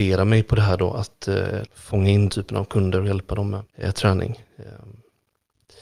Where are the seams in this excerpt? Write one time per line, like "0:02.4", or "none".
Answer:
0:01.7
0:02.3
0:03.7